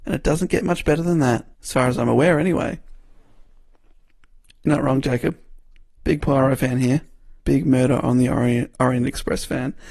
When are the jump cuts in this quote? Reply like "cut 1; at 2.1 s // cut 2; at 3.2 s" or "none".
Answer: cut 1; at 1.5 s // cut 2; at 7.4 s